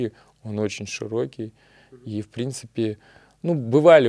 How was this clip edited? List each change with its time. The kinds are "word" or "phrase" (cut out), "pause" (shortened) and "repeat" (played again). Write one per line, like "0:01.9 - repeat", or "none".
none